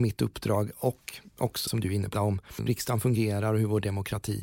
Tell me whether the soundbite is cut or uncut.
cut